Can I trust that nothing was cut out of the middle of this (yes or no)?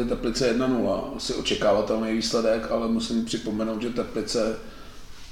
yes